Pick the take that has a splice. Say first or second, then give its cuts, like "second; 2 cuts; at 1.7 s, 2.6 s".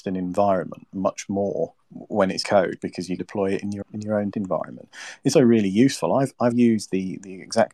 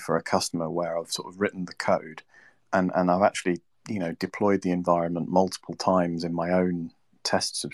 first; 7 cuts; at 1.8 s, 2.4 s, 3.2 s, 3.8 s, 4.3 s, 5.3 s, 6.5 s